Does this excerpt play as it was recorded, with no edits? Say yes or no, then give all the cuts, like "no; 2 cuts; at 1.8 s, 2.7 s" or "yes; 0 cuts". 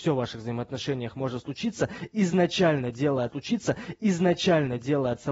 no; 1 cut; at 3.3 s